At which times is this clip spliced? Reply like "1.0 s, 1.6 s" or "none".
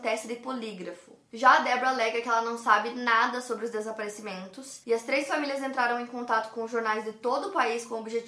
none